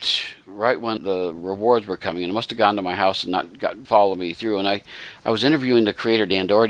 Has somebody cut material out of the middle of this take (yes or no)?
yes